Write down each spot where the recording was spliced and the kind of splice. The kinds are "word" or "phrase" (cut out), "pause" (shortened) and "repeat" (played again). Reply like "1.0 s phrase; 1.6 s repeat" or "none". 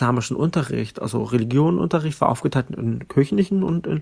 none

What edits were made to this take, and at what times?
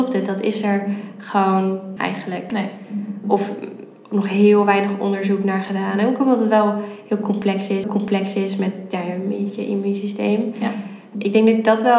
2.0 s word; 7.8 s repeat

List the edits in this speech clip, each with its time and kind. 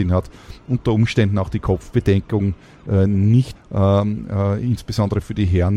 3.6 s word

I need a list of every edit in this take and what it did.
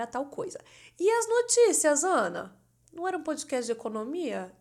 none

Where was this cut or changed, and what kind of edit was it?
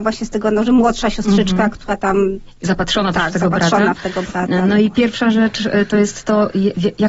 none

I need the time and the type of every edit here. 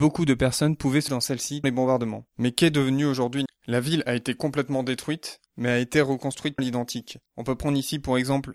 1.1 s word; 1.6 s word; 2.3 s pause; 3.5 s word; 5.5 s pause; 6.6 s word; 7.3 s pause

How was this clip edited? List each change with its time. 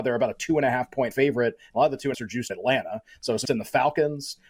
1.1 s word; 2.1 s word; 2.5 s word; 3.4 s word

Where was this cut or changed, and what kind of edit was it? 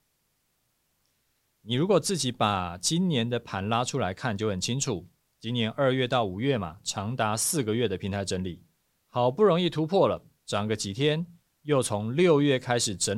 none

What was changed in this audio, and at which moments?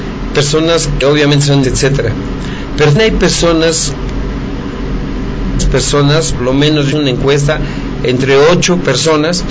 1.0 s word; 1.6 s word; 3.0 s word; 5.6 s word; 6.4 s word; 6.9 s word

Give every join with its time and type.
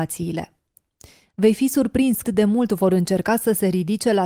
2.2 s word

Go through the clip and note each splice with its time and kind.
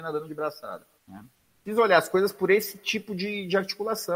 0.9 s pause

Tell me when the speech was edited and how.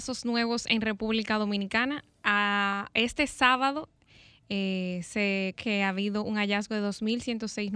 5.5 s word

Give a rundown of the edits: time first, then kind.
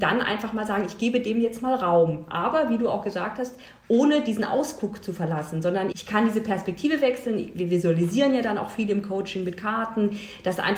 5.9 s word

